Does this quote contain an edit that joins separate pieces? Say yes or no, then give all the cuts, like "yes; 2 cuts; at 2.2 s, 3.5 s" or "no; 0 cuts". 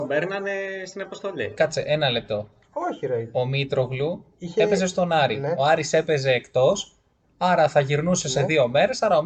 no; 0 cuts